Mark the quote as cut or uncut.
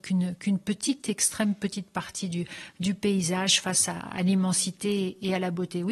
uncut